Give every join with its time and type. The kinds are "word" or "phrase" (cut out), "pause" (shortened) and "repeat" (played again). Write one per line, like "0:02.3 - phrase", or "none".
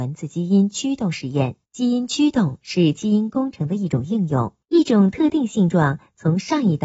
0:01.6 - pause
0:04.6 - pause